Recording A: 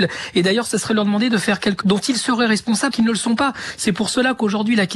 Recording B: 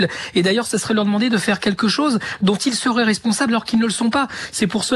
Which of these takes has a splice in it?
A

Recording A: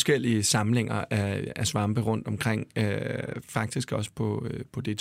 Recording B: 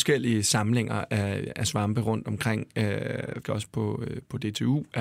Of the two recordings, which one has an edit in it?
B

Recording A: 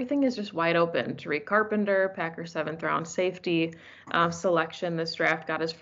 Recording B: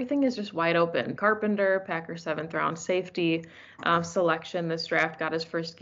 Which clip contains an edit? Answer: B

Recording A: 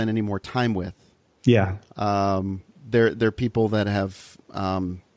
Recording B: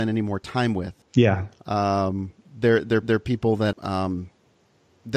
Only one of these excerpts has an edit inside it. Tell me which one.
B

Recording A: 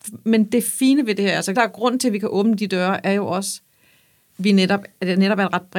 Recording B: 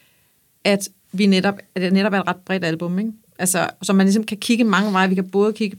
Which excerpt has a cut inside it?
A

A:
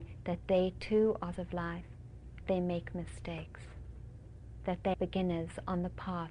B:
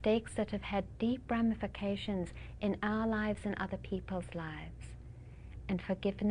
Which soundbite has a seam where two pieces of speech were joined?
A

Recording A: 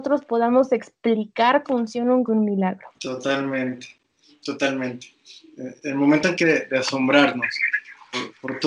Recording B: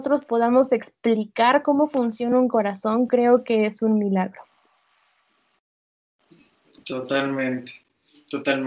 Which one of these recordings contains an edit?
A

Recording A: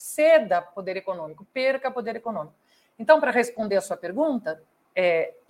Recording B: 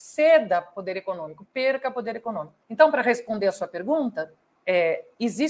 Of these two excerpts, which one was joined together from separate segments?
B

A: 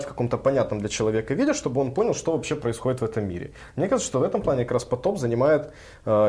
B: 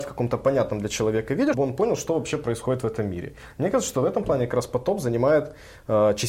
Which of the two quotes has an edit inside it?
B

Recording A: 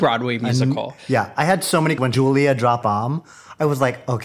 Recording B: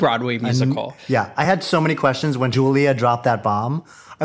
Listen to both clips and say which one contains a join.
A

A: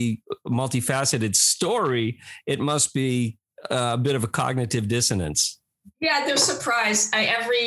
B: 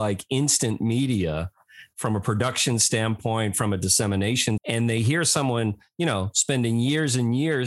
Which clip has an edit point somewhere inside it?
B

